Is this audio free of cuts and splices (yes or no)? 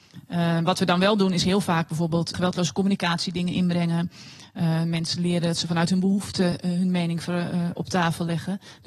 yes